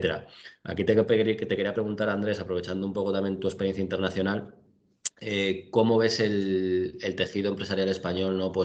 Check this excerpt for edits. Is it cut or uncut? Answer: cut